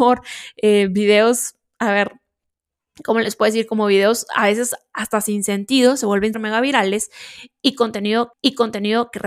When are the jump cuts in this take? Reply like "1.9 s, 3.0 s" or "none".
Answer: 6.3 s, 8.3 s